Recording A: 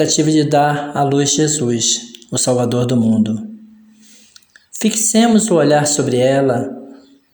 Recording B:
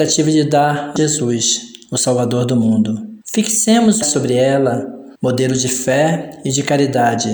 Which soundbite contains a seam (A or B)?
B